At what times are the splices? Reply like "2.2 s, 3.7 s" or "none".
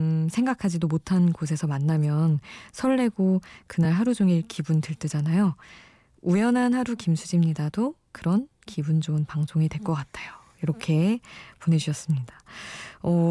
none